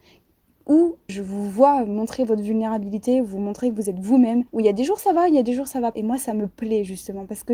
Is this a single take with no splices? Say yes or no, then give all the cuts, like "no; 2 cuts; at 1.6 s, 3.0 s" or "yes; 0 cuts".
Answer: no; 3 cuts; at 1.1 s, 4.5 s, 5.9 s